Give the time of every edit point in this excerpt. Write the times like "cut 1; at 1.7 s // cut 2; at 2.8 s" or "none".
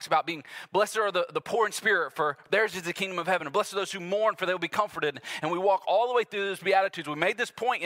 none